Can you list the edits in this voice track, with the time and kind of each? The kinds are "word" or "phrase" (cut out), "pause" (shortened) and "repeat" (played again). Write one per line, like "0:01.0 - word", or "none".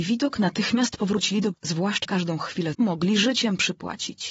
0:01.5 - word
0:02.0 - word
0:02.7 - word